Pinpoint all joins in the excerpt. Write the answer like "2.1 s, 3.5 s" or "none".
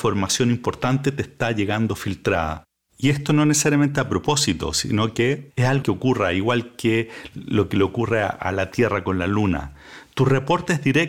5.8 s